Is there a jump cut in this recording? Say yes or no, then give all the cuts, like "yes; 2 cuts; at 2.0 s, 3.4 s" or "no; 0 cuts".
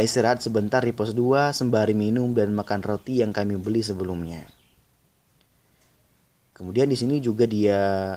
no; 0 cuts